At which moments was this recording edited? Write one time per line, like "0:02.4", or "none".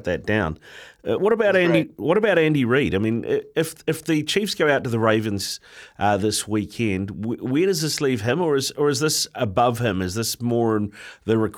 0:01.2